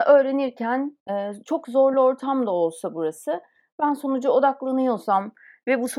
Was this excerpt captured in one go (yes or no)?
yes